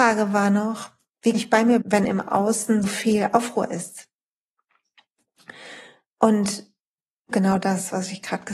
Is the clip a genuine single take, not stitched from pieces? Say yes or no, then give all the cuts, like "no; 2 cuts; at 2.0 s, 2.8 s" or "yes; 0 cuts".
no; 4 cuts; at 1.3 s, 1.8 s, 2.8 s, 7.3 s